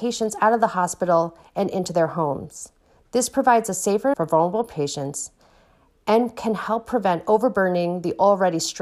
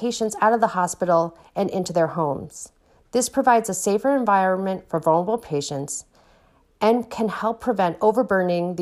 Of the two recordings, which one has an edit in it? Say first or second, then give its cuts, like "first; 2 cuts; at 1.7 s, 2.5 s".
first; 1 cut; at 4.1 s